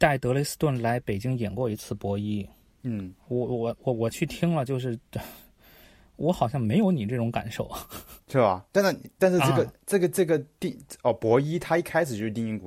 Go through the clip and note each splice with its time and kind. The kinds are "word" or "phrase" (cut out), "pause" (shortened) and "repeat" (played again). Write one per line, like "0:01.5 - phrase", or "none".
0:08.7 - pause